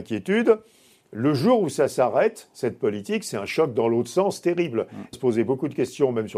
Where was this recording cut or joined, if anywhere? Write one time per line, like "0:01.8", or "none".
0:05.1